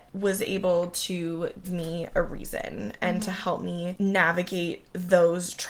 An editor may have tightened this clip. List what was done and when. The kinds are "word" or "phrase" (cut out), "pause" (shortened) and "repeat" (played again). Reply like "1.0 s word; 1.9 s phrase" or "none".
1.6 s word